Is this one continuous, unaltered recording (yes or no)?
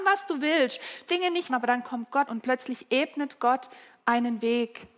no